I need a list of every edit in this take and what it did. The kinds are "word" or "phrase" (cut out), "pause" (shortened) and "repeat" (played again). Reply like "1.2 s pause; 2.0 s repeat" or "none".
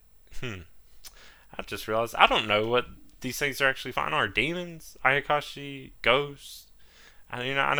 none